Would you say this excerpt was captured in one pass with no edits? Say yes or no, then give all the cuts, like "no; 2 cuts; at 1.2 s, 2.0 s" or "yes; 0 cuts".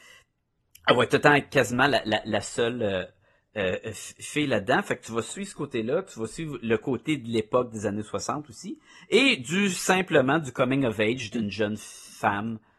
yes; 0 cuts